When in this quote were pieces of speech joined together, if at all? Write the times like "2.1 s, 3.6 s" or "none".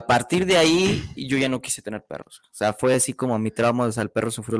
none